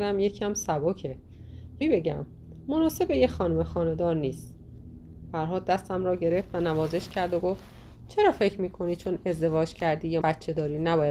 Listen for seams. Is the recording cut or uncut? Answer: cut